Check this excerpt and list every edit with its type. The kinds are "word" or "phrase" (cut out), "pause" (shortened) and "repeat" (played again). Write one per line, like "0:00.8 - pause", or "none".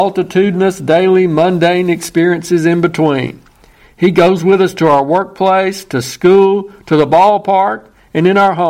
none